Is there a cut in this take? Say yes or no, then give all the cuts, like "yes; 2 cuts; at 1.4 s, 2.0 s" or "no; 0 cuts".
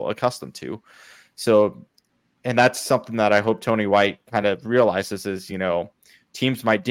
no; 0 cuts